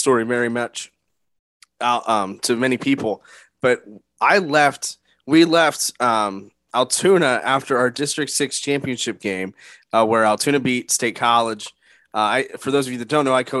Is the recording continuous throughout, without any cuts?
yes; 0 cuts

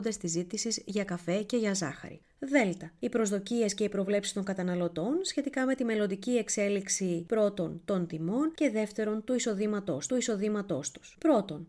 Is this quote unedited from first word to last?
no; 1 cut; at 10.1 s

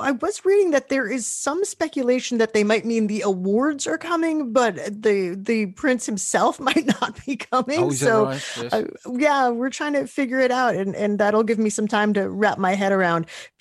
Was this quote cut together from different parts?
no; 0 cuts

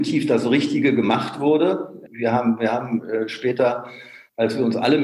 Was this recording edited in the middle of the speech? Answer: no; 0 cuts

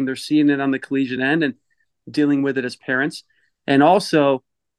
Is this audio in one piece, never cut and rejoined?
yes; 0 cuts

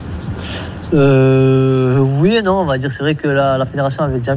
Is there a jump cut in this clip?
no; 0 cuts

